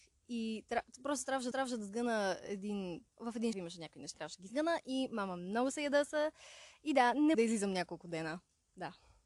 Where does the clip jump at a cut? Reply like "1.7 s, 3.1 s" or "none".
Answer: 1.5 s, 3.1 s, 3.5 s, 4.1 s, 7.3 s